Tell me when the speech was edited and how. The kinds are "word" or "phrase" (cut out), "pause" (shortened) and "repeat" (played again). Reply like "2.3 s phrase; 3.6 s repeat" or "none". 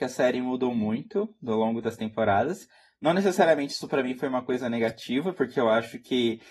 none